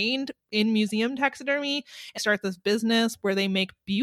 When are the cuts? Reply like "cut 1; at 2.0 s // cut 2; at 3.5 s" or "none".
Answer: cut 1; at 2.2 s